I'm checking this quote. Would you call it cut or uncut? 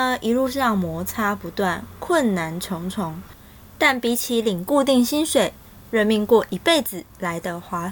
uncut